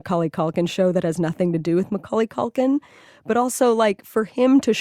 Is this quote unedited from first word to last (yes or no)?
yes